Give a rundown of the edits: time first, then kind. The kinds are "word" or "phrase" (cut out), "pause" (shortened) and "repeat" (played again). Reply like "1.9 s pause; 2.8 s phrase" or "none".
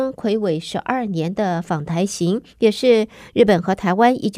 2.5 s pause